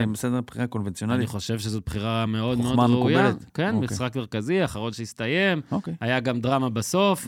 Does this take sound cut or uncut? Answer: uncut